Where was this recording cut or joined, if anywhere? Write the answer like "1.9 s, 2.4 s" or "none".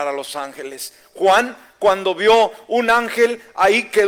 none